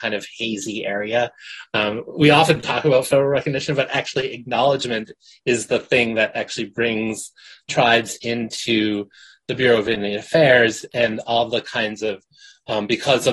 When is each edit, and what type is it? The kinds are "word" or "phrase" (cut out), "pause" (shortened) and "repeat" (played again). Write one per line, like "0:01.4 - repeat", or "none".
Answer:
none